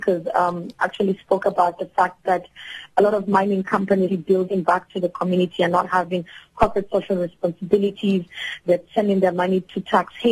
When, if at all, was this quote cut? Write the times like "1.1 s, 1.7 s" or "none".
4.1 s